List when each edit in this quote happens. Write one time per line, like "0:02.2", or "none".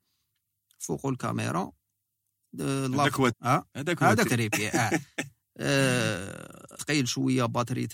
0:03.3
0:04.3
0:06.8